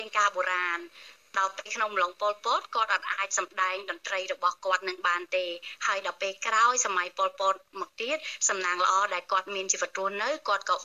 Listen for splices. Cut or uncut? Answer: uncut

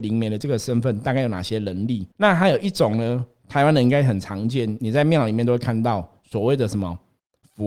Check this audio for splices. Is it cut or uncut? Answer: cut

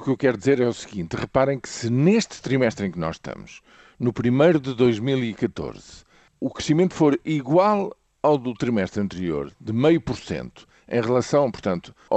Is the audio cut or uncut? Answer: uncut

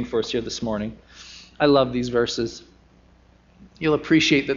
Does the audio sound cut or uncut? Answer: uncut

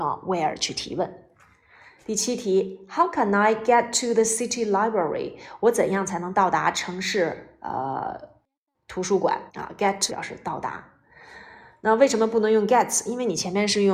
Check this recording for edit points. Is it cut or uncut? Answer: cut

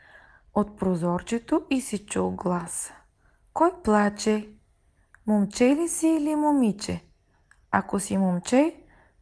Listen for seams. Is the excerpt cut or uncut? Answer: uncut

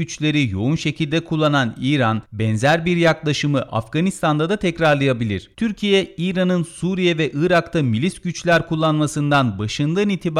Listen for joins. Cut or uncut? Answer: cut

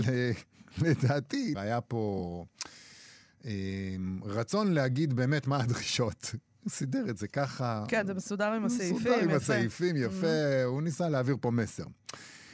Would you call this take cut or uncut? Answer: cut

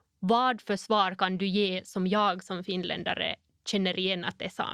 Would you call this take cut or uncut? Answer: uncut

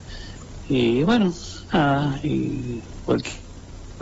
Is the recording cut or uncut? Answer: uncut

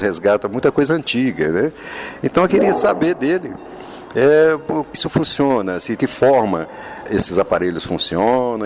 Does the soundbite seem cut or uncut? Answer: cut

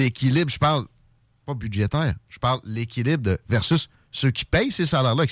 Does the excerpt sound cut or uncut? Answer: uncut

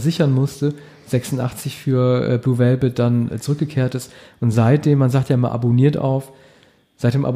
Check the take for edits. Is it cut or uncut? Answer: uncut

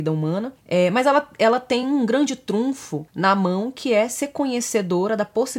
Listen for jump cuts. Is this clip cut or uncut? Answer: uncut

